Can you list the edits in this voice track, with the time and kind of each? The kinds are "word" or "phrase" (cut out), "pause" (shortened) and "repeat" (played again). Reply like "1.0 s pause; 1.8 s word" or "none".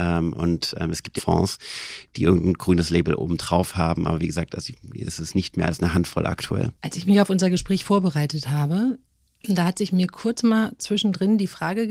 1.2 s phrase; 6.8 s pause